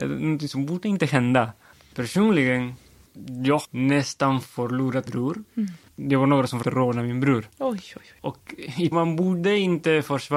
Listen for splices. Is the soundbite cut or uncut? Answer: cut